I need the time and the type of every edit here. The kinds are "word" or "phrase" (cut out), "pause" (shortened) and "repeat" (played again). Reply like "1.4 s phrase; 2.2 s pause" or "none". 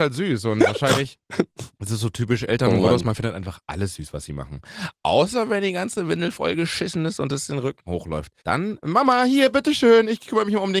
1.7 s pause; 8.4 s pause